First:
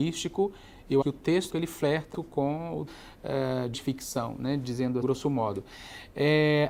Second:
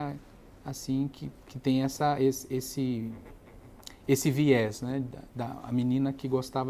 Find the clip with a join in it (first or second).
first